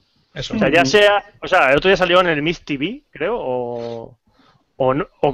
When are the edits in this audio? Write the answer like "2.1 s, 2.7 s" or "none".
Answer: none